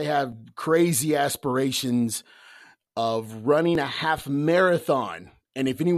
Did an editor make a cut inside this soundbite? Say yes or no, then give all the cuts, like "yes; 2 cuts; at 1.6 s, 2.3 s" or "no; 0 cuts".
no; 0 cuts